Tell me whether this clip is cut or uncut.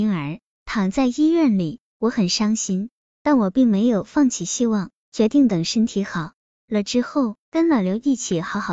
cut